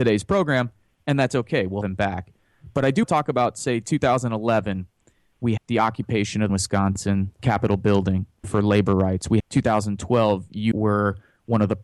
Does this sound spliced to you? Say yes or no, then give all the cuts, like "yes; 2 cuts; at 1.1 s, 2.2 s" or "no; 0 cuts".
yes; 8 cuts; at 1.8 s, 3.0 s, 5.6 s, 6.5 s, 7.4 s, 8.4 s, 9.4 s, 10.7 s